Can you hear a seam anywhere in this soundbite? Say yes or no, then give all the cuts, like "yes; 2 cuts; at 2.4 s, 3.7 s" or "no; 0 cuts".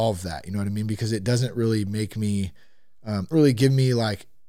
yes; 1 cut; at 3.3 s